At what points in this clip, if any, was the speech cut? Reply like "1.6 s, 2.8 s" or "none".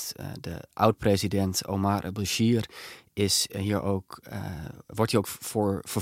none